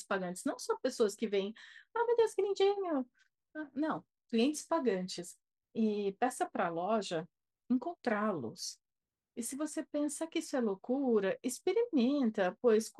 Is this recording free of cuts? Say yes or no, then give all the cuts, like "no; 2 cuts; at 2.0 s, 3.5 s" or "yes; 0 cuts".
yes; 0 cuts